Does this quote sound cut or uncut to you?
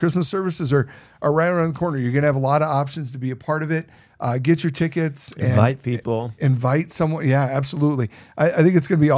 uncut